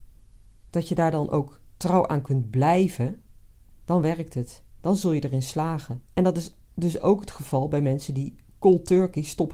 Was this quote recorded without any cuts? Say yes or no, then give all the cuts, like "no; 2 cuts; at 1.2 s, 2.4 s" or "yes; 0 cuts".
no; 2 cuts; at 3.8 s, 6.0 s